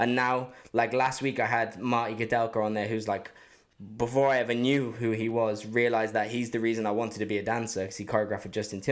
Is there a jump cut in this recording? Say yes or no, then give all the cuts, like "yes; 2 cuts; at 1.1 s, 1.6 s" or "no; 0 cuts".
no; 0 cuts